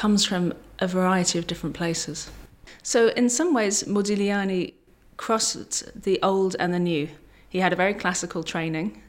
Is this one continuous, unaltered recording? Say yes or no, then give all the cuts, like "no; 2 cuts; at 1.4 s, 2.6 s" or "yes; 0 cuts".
yes; 0 cuts